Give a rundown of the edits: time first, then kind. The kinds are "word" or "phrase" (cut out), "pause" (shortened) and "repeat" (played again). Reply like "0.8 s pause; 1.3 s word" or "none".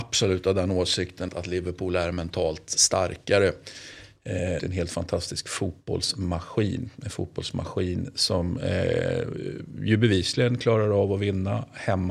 1.3 s word; 4.6 s phrase